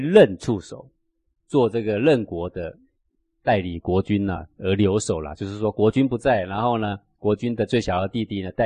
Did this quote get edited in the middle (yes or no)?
no